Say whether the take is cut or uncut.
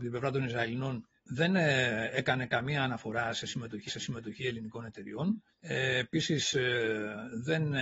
cut